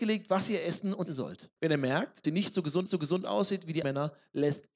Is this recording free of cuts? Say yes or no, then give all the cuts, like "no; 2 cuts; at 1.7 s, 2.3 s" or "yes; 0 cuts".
no; 5 cuts; at 1.1 s, 1.6 s, 2.2 s, 2.9 s, 3.8 s